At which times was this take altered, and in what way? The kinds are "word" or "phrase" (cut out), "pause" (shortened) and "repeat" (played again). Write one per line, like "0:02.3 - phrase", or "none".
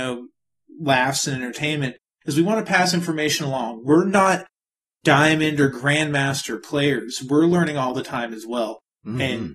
none